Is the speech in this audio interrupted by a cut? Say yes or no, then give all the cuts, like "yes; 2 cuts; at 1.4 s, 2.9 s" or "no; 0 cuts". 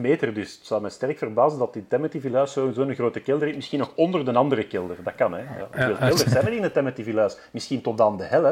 no; 0 cuts